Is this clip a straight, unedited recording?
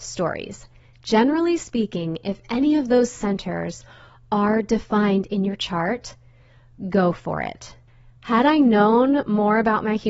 yes; 0 cuts

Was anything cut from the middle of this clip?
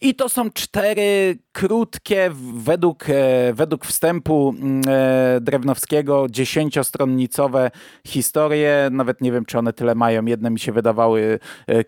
no; 0 cuts

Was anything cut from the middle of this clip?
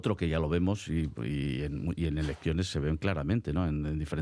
no; 0 cuts

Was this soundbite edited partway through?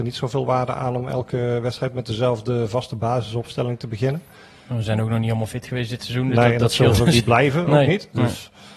no; 0 cuts

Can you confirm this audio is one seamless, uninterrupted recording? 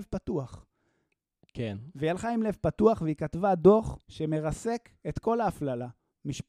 no; 1 cut; at 4.0 s

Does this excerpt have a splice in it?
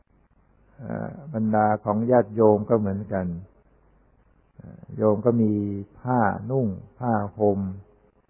yes; 2 cuts; at 5.9 s, 6.9 s

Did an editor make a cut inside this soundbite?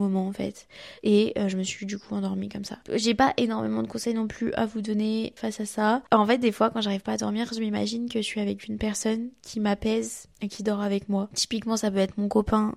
yes; 2 cuts; at 1.0 s, 10.3 s

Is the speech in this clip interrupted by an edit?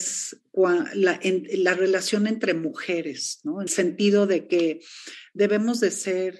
yes; 1 cut; at 3.7 s

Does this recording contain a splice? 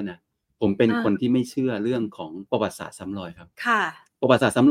yes; 2 cuts; at 2.5 s, 3.5 s

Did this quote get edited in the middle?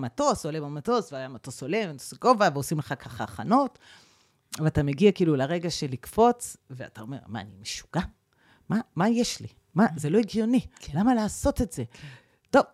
no; 0 cuts

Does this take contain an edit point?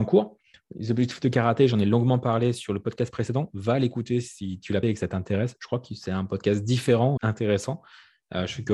yes; 2 cuts; at 4.8 s, 7.2 s

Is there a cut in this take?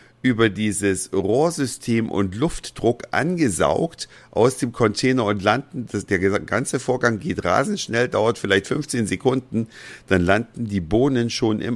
no; 0 cuts

